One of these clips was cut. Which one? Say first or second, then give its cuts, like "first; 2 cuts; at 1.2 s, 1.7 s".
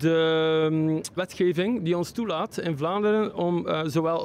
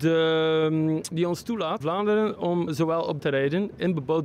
second; 4 cuts; at 1.1 s, 1.8 s, 2.7 s, 3.2 s